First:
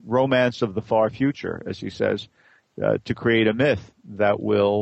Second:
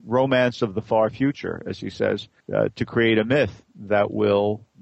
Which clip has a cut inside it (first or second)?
second